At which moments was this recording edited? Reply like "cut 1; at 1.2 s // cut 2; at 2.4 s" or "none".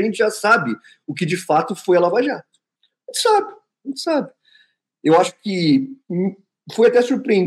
none